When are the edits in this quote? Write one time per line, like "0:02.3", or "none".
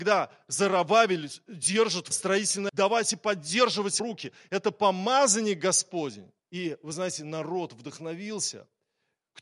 0:02.1
0:02.7
0:04.0
0:06.4